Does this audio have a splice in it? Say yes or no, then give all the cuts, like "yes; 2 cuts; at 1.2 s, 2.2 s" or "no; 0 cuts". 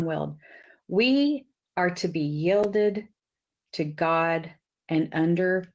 no; 0 cuts